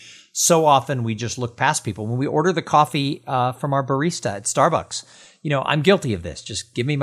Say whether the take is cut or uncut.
uncut